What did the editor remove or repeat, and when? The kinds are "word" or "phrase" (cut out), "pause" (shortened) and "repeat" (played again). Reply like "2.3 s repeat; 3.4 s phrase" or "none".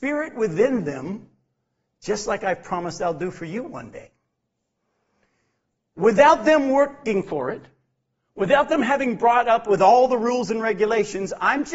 none